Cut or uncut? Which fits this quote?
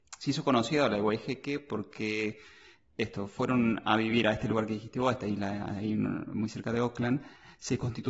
uncut